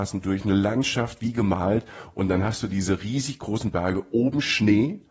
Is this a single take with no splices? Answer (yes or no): yes